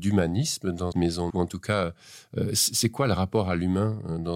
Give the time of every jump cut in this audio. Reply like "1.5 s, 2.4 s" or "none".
0.9 s, 1.3 s